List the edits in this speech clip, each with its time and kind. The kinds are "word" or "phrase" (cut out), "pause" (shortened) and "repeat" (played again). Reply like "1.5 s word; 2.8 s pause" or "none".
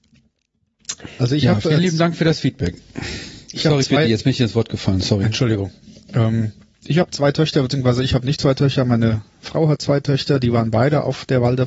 none